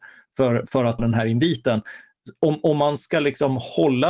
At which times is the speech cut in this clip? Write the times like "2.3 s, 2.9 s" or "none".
1.0 s, 3.0 s